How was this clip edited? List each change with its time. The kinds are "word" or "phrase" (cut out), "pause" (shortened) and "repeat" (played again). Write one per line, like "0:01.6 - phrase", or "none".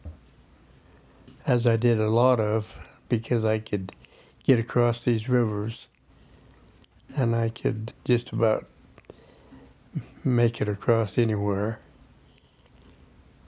0:07.9 - word